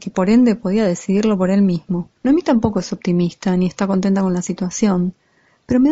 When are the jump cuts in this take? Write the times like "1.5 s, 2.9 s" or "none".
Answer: 2.2 s